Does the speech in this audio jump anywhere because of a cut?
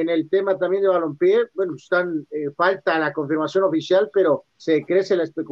yes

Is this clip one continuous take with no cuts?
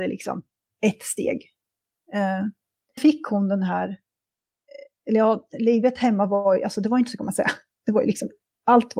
no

